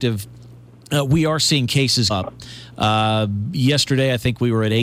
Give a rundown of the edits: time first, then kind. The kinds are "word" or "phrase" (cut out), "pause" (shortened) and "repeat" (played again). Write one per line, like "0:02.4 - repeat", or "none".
0:02.1 - word